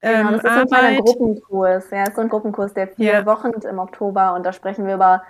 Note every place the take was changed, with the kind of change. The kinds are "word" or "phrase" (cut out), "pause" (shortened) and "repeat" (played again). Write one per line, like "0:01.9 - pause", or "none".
0:02.3 - word
0:03.6 - word